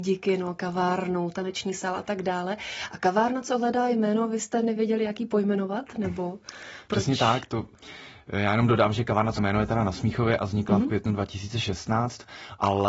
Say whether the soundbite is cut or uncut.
cut